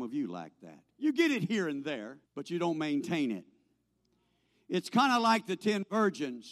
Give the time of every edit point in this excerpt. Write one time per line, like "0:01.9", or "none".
0:00.9
0:02.3